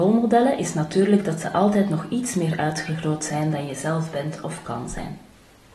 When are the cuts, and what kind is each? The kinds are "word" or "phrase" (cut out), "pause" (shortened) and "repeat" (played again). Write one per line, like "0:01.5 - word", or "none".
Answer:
none